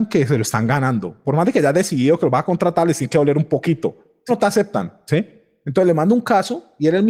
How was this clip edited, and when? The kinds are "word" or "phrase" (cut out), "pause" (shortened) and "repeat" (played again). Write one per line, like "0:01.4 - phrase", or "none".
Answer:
0:04.3 - word